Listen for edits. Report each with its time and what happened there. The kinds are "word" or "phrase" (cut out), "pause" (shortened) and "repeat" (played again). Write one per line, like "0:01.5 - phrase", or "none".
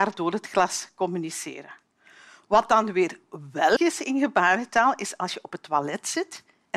0:03.8 - word